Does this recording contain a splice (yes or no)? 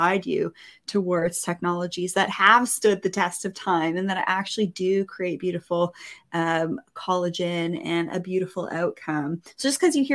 no